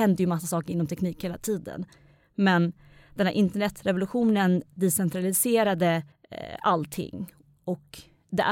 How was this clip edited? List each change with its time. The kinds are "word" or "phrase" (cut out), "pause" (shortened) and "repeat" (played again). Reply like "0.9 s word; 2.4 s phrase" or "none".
6.1 s pause